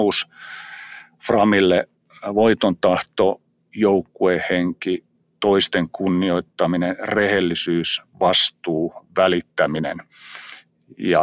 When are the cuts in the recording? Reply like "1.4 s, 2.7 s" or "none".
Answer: none

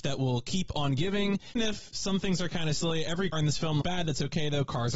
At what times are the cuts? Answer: 1.6 s, 3.3 s, 3.8 s

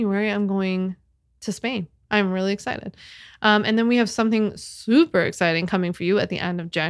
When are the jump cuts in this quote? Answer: none

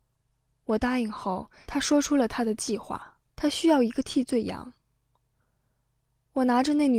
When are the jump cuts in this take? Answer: 3.3 s

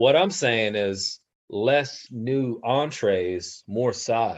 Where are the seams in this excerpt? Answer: 2.1 s

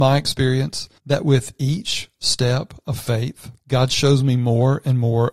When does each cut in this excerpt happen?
1.0 s, 3.6 s

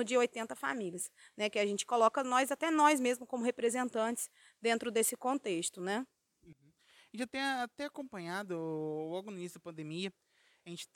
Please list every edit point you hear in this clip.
none

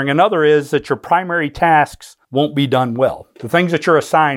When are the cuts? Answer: 2.2 s

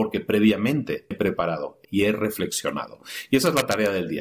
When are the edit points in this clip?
1.1 s, 1.8 s

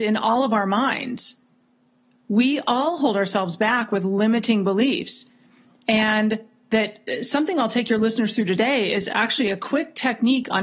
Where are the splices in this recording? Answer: none

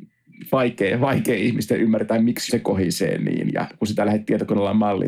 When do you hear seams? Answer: 2.5 s

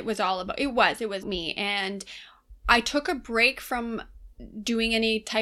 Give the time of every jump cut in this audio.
1.2 s, 2.6 s

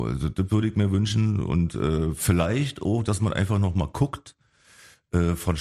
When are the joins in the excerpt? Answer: none

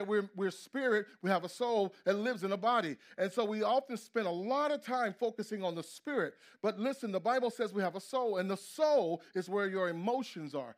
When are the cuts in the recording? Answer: none

